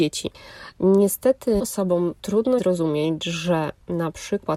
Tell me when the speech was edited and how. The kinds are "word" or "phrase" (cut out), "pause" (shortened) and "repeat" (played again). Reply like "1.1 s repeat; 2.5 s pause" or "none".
1.6 s word; 2.6 s word